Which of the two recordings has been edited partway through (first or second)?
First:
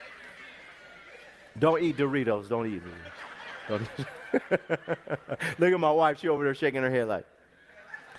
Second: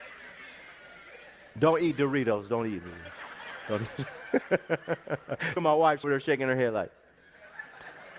second